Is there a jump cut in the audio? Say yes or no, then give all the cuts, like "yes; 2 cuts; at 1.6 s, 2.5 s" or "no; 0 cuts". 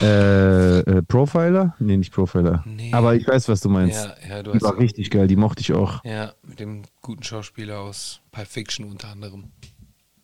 yes; 2 cuts; at 6.9 s, 8.3 s